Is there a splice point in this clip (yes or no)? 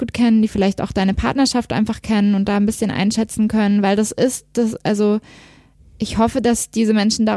no